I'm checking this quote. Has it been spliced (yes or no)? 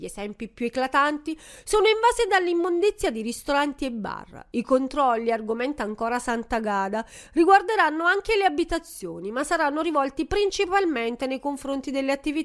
no